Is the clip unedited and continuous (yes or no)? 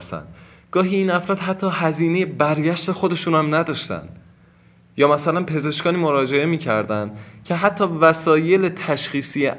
yes